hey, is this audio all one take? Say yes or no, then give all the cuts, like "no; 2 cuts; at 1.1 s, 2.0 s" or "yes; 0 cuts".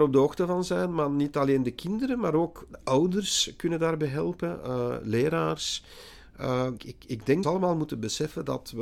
no; 2 cuts; at 6.8 s, 7.4 s